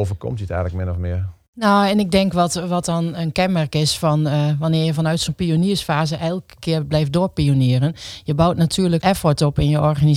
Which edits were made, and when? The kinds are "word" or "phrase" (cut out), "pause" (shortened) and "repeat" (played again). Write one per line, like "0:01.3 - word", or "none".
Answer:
0:09.0 - word